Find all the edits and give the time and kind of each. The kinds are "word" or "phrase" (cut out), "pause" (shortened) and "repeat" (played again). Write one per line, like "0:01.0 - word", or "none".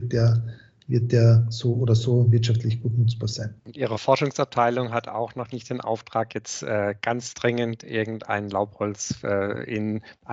0:03.6 - pause

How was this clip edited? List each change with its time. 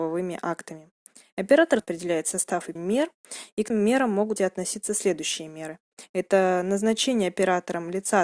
0:01.8 - word
0:02.8 - word
0:03.7 - word
0:04.4 - phrase

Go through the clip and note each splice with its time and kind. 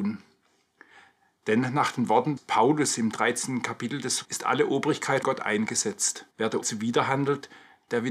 0:02.4 - word
0:04.2 - word
0:05.2 - word
0:06.3 - pause
0:06.6 - word

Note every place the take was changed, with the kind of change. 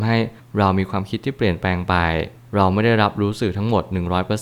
none

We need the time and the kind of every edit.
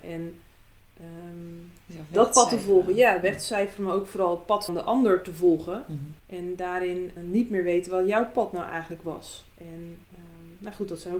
0:04.7 - word
0:06.2 - pause
0:07.2 - word
0:10.0 - pause

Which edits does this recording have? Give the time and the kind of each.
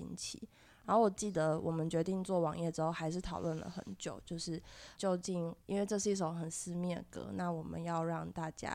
0:05.0 - word
0:05.6 - pause

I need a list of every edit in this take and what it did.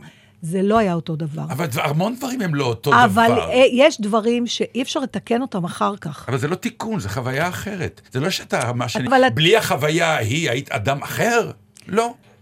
0:08.1 - pause
0:09.1 - word

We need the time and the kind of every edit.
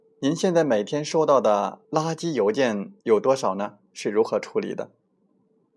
0:01.8 - pause
0:03.0 - pause

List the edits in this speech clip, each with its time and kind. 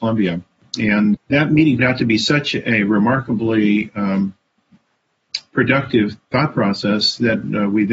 0:01.1 - word
0:01.8 - word

